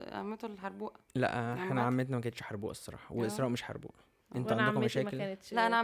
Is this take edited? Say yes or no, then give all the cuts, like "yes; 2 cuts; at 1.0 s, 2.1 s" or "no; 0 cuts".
yes; 2 cuts; at 1.1 s, 4.2 s